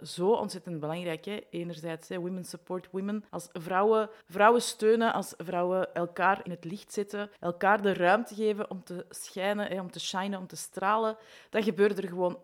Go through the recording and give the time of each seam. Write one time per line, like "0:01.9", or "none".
0:03.3
0:04.2
0:06.5
0:07.4